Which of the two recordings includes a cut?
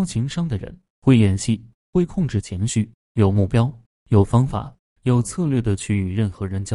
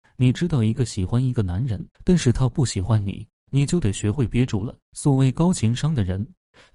second; 2 cuts; at 1.9 s, 4.8 s

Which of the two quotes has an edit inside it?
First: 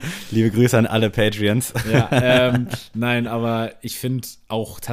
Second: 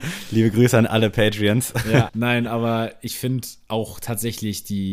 second; 1 cut; at 2.1 s

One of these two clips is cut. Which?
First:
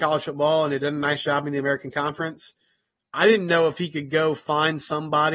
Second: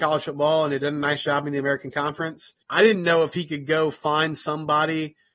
second; 1 cut; at 2.6 s

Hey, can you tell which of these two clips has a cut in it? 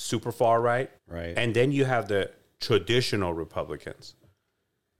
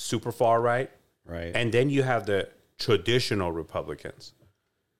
first; 1 cut; at 1.0 s

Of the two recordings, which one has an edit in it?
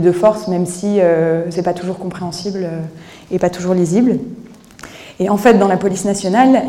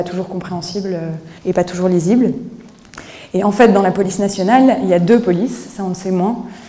second; 1 cut; at 1.4 s

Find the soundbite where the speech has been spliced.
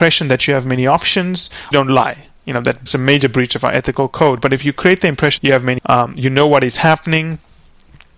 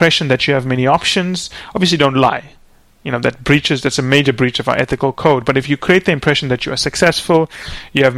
first; 5 cuts; at 1.7 s, 2.4 s, 2.9 s, 5.4 s, 5.8 s

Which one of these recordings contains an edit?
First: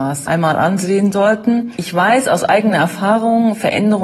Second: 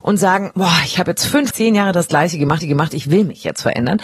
second; 2 cuts; at 1.5 s, 2.6 s

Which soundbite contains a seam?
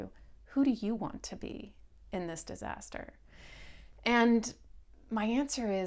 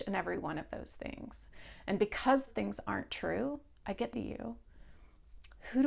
second; 2 cuts; at 2.5 s, 4.1 s

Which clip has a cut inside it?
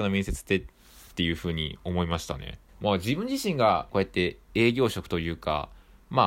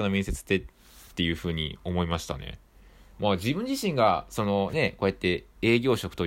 first; 2 cuts; at 2.7 s, 3.9 s

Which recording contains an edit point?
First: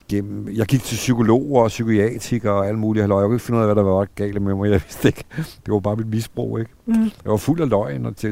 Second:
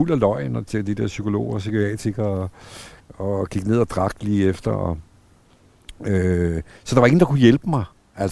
second; 1 cut; at 3.0 s

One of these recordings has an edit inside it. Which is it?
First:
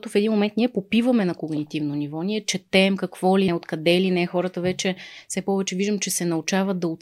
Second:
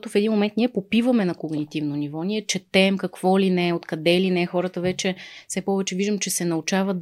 first; 1 cut; at 3.5 s

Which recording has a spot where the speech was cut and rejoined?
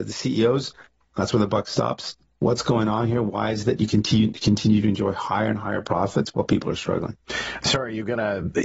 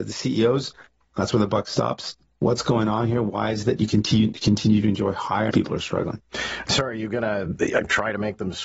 second; 1 cut; at 5.5 s

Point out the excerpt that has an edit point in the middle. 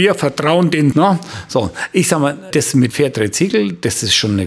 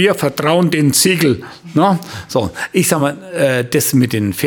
first; 3 cuts; at 0.9 s, 2.5 s, 2.9 s

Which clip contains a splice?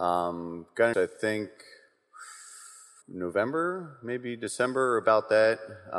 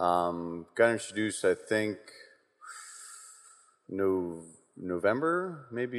first; 2 cuts; at 0.9 s, 3.0 s

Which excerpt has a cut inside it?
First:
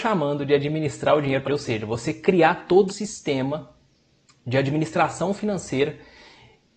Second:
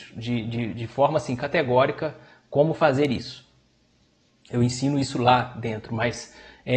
first; 2 cuts; at 1.4 s, 2.9 s

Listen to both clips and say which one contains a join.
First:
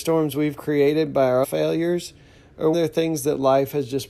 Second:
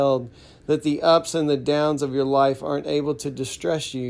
first; 2 cuts; at 1.4 s, 2.7 s

